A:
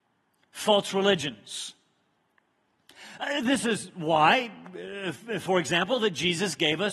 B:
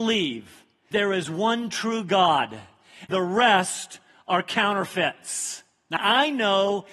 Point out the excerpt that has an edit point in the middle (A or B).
B